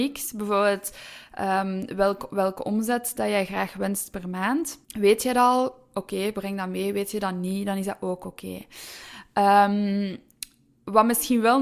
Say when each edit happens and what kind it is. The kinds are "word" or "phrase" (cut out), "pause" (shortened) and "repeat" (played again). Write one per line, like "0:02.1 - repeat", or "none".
0:04.8 - pause